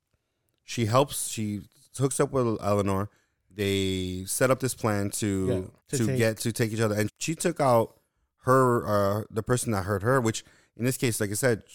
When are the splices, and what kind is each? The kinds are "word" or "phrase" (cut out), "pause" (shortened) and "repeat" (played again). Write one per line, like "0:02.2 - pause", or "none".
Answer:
0:05.8 - pause
0:07.1 - word